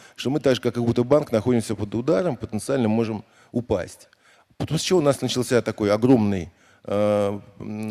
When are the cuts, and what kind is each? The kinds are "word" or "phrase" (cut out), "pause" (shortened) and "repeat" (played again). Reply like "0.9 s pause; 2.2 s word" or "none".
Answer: none